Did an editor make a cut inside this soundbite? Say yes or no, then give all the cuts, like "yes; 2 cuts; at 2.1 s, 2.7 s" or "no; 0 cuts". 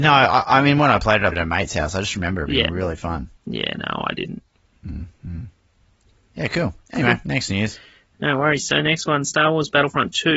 yes; 3 cuts; at 1.3 s, 3.4 s, 4.6 s